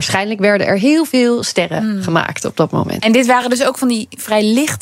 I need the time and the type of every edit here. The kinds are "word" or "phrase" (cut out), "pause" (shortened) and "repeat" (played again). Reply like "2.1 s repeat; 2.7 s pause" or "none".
none